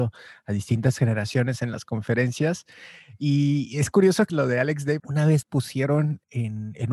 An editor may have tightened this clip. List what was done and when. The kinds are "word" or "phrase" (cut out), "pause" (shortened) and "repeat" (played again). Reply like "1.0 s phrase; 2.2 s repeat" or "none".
4.3 s word; 5.0 s word; 5.4 s word